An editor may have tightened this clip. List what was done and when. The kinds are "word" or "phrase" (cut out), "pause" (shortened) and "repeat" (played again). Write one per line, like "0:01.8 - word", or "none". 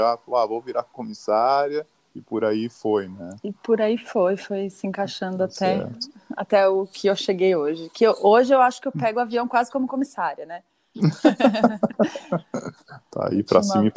none